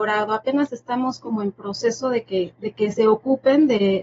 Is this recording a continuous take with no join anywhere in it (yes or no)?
yes